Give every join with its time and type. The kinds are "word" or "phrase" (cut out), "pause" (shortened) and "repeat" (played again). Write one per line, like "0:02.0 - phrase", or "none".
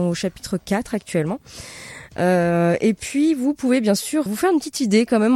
0:04.3 - word